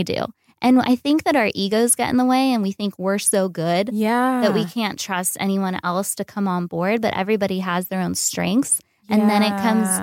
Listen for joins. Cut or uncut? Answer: uncut